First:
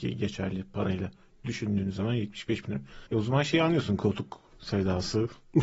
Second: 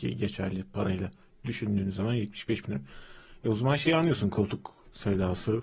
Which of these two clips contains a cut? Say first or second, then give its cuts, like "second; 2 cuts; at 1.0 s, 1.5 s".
first; 1 cut; at 3.1 s